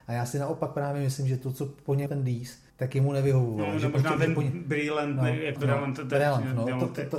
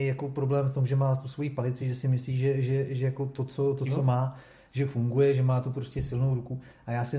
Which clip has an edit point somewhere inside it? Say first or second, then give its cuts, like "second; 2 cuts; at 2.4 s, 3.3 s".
first; 4 cuts; at 2.1 s, 2.7 s, 3.9 s, 5.6 s